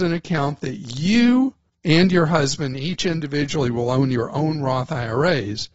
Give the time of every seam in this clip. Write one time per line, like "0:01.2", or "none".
0:01.7